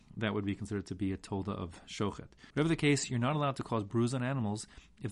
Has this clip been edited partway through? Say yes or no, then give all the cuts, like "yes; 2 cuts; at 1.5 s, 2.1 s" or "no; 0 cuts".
yes; 1 cut; at 2.5 s